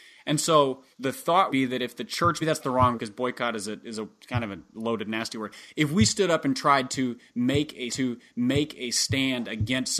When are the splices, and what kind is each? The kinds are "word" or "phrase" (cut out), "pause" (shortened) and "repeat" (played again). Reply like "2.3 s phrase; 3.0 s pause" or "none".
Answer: 0.9 s pause; 1.5 s word; 2.4 s phrase; 2.9 s word; 7.9 s repeat